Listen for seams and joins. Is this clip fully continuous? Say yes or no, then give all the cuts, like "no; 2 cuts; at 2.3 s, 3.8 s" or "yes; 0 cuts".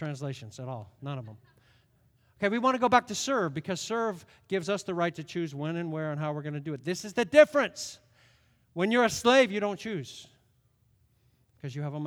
yes; 0 cuts